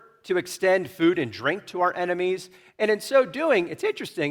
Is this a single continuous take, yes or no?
yes